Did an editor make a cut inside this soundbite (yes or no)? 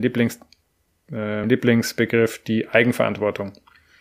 yes